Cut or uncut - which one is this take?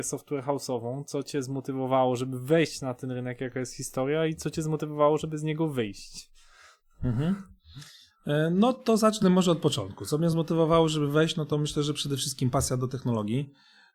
uncut